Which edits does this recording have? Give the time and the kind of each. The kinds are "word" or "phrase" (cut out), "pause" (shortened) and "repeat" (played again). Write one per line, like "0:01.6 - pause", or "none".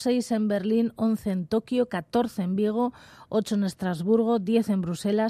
none